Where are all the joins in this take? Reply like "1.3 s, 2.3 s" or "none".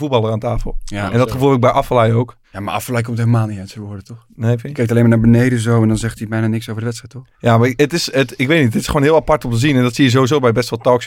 2.4 s, 7.3 s